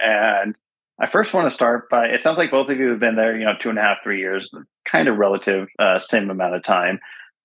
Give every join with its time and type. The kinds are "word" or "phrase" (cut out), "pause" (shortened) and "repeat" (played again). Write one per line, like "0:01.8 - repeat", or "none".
0:05.7 - pause